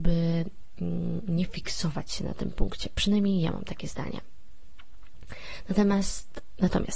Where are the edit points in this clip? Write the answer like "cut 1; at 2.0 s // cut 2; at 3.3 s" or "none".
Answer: none